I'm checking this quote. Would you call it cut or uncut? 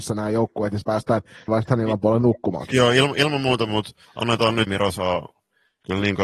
cut